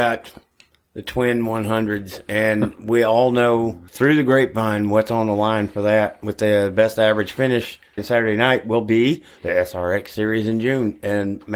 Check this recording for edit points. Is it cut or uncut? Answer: cut